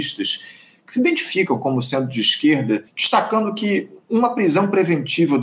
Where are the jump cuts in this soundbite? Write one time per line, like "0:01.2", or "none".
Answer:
0:02.9

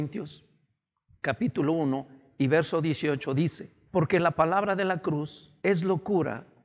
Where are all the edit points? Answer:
0:03.9
0:05.6

